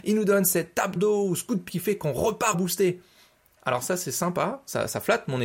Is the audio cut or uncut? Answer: cut